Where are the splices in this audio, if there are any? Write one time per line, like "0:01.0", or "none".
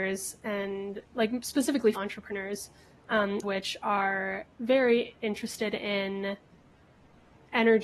0:01.1
0:01.9
0:03.4
0:04.5